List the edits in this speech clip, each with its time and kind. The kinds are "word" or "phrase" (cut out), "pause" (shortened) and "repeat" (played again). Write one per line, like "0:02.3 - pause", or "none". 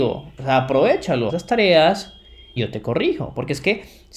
0:01.3 - word
0:02.6 - word